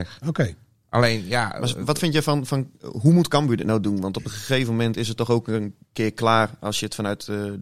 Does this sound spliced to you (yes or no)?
no